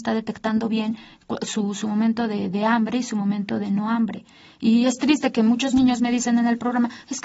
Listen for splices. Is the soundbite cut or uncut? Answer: uncut